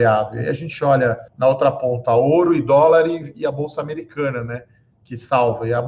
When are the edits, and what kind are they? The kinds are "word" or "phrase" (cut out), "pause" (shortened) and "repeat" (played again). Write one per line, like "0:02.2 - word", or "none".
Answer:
0:01.3 - pause